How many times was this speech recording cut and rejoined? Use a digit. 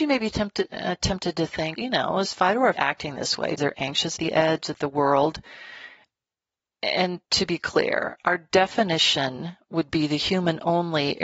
4